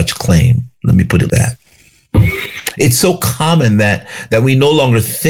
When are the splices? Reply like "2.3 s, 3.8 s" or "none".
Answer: 1.3 s